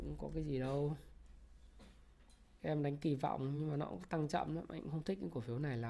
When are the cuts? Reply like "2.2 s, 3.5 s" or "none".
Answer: none

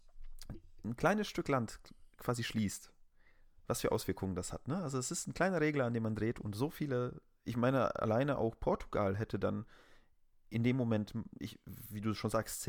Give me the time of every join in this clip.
none

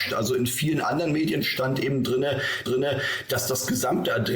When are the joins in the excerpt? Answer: 2.7 s

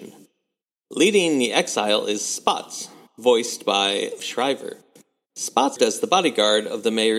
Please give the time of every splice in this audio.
4.2 s, 5.8 s

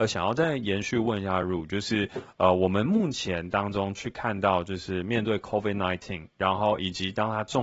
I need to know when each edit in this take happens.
none

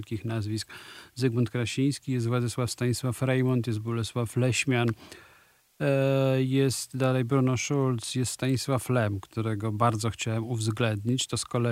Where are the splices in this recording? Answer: none

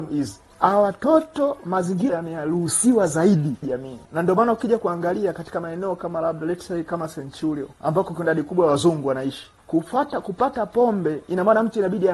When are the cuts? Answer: 2.1 s, 3.6 s, 4.0 s, 7.7 s

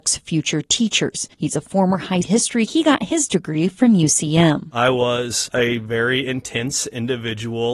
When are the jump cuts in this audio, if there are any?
1.3 s, 2.2 s, 2.7 s, 5.5 s

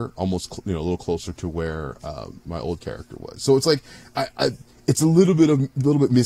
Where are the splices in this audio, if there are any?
none

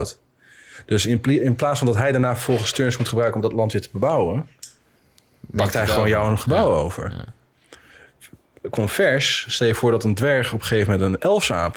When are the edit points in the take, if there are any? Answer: none

